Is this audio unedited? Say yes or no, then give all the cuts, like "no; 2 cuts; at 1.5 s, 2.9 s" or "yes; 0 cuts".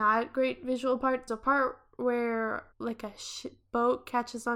no; 2 cuts; at 1.3 s, 2.7 s